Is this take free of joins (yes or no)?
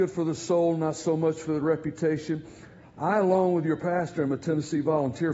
yes